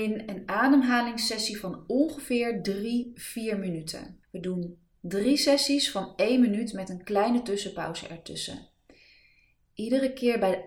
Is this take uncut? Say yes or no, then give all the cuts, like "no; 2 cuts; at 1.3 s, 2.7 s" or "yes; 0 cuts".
no; 1 cut; at 4.2 s